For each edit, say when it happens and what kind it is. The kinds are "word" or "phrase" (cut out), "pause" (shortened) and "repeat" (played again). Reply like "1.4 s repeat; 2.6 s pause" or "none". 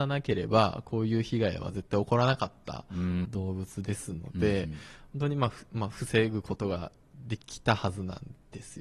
3.2 s phrase; 7.4 s pause

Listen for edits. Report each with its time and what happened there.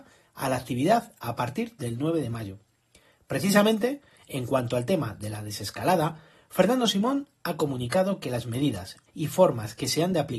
9.1 s word

